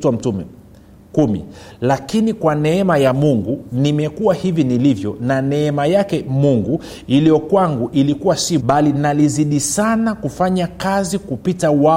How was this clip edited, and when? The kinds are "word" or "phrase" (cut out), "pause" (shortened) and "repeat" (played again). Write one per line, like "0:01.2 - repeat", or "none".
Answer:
0:08.6 - word